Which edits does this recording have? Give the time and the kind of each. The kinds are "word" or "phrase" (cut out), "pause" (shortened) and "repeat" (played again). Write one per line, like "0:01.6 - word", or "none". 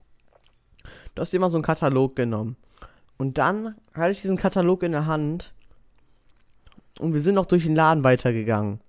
none